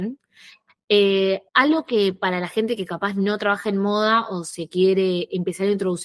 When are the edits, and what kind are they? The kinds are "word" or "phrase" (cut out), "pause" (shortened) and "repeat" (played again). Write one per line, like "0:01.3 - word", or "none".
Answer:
0:01.5 - pause